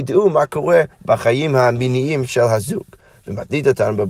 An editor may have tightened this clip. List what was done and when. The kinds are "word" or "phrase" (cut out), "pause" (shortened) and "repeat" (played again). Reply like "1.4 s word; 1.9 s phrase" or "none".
0.9 s pause

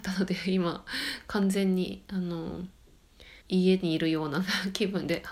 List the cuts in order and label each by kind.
3.4 s pause

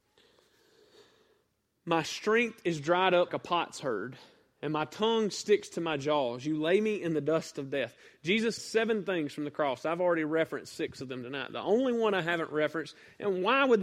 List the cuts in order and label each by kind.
3.3 s word; 8.6 s word

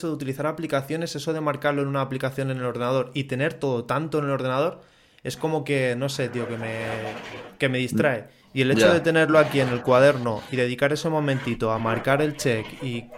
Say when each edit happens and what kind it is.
none

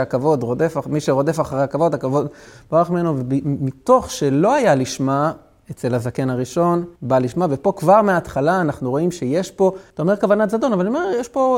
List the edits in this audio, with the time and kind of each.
7.0 s pause; 9.9 s pause

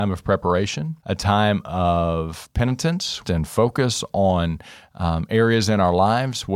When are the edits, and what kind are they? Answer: 1.0 s pause; 3.2 s phrase

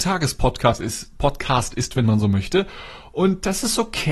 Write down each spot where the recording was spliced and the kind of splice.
none

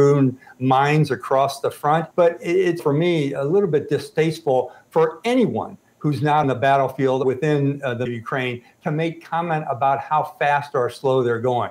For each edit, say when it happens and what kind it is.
2.1 s pause; 2.8 s word; 3.4 s word; 6.4 s word; 7.2 s word; 8.1 s word

